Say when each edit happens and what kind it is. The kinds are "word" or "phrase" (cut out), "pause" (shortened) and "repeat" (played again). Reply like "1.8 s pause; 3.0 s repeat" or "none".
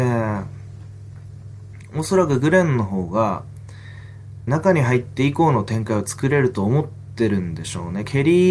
4.5 s phrase

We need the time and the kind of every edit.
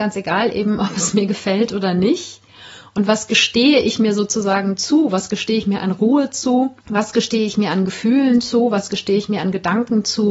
6.8 s pause

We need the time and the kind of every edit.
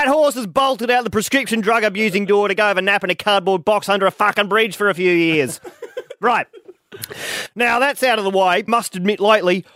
8.7 s word

